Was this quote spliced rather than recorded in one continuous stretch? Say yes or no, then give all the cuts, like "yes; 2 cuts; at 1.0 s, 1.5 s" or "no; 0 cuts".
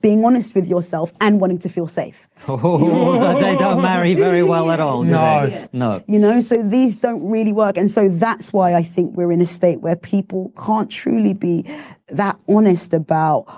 no; 0 cuts